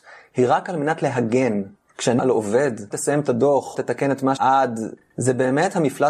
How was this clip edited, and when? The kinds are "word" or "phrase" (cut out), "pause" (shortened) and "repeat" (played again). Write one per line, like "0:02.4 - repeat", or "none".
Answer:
0:02.2 - word
0:02.9 - word
0:03.7 - word
0:04.4 - word